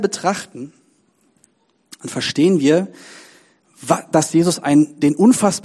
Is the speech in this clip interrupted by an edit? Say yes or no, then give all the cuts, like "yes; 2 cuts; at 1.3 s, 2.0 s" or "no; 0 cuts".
no; 0 cuts